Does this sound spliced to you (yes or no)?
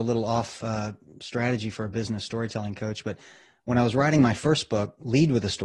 no